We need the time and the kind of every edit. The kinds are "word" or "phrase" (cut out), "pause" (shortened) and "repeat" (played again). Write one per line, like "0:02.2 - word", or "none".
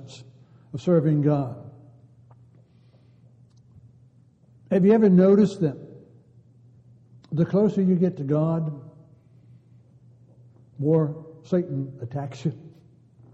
none